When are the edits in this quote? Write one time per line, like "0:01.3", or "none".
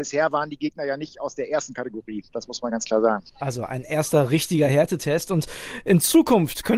0:03.3